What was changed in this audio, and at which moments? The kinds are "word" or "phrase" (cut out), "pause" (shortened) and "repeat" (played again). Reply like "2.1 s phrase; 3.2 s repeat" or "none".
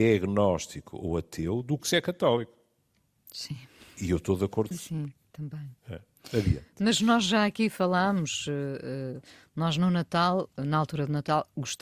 1.8 s word; 4.7 s word; 7.0 s word

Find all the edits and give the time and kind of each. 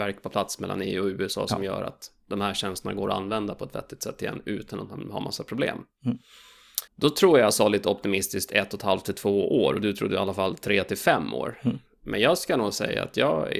6.9 s pause

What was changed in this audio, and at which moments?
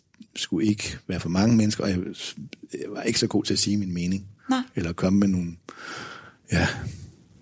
4.4 s pause

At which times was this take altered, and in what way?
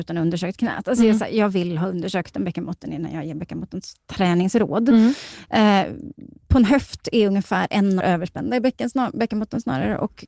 8.0 s phrase

